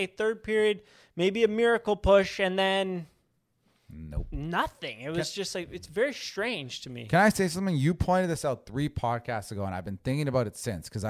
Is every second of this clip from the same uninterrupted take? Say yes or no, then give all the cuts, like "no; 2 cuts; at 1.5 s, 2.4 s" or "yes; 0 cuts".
yes; 0 cuts